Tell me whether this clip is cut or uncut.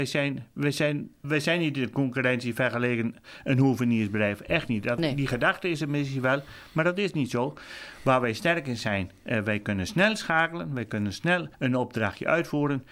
cut